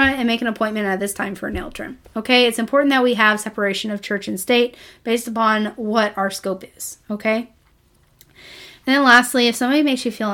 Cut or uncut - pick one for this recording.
uncut